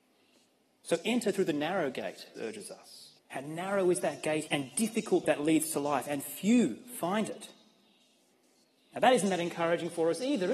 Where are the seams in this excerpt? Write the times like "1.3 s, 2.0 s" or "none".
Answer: 2.4 s, 3.2 s, 4.5 s, 5.2 s